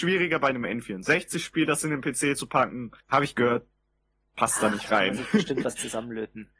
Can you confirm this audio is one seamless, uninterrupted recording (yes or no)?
no